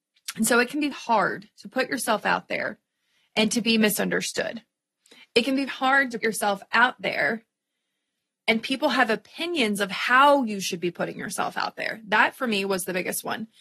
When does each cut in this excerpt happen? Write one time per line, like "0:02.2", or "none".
0:00.9
0:05.7
0:06.2